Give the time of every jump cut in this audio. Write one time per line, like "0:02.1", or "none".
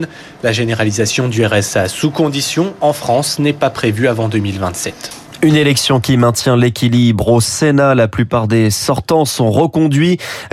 none